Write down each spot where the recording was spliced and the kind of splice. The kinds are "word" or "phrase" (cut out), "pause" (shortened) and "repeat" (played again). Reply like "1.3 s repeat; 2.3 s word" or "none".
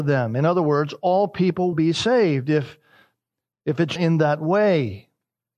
1.7 s word; 4.0 s word